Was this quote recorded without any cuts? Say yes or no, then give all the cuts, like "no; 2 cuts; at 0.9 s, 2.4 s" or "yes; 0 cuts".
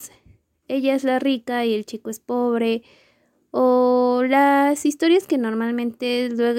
yes; 0 cuts